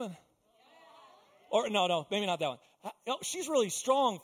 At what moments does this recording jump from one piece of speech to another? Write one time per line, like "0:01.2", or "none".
none